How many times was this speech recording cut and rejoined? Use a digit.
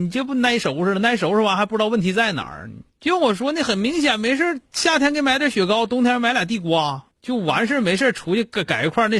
2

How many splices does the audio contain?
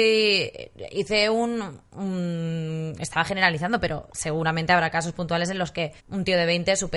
1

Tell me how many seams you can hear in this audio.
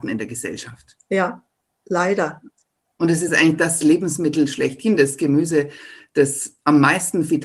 0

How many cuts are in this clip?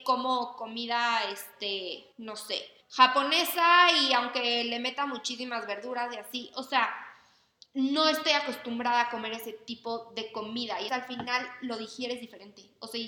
3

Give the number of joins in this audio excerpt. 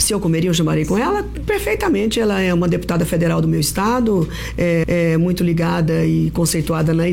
1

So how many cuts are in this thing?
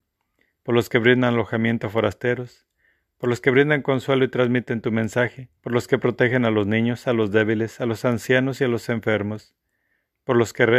1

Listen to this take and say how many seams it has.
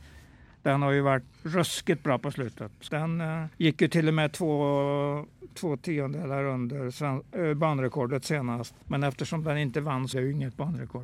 5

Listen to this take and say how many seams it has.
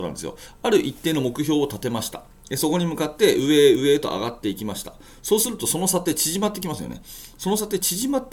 0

